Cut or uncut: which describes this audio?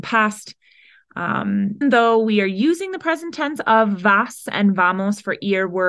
cut